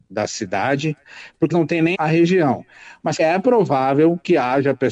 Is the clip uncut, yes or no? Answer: no